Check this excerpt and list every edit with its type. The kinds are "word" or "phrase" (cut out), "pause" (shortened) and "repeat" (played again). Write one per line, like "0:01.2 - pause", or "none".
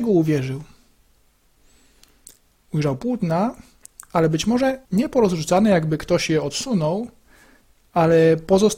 0:04.8 - pause